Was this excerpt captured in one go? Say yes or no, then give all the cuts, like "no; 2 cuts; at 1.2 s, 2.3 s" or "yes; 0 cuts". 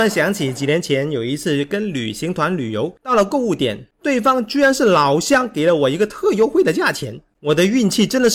no; 1 cut; at 3.0 s